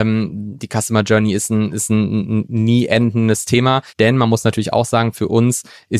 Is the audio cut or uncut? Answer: cut